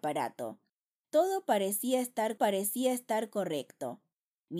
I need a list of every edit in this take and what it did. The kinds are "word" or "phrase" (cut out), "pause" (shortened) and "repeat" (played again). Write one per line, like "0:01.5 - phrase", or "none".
0:02.4 - repeat